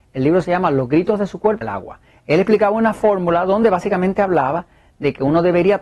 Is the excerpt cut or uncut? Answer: cut